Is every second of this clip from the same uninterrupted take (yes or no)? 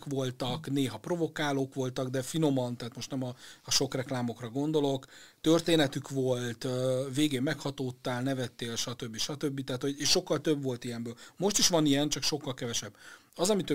yes